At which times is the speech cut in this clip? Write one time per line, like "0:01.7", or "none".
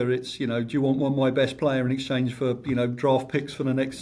none